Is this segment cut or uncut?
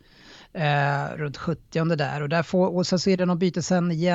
uncut